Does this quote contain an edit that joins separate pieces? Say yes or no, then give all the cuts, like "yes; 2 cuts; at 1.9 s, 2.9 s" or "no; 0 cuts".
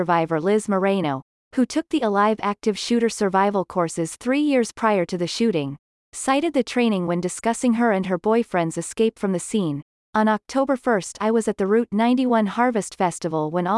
no; 0 cuts